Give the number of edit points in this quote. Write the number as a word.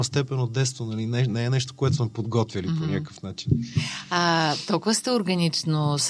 zero